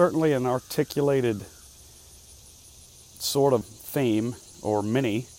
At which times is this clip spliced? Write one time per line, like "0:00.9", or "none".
0:03.6